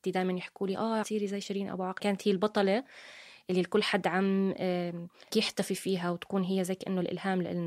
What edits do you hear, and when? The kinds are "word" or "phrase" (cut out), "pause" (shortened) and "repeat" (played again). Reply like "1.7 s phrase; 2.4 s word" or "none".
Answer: 1.0 s word; 2.0 s word; 5.3 s word